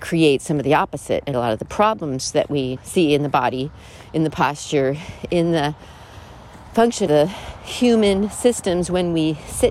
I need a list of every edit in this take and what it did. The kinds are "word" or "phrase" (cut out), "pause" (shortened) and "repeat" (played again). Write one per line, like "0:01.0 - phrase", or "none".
0:01.3 - word
0:02.8 - word
0:07.1 - word